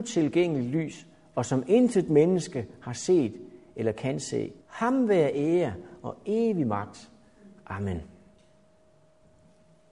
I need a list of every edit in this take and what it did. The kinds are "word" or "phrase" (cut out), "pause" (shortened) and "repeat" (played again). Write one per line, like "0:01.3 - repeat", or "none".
0:04.6 - pause